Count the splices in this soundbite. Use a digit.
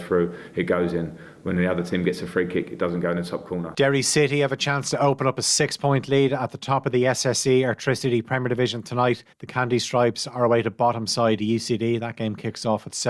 1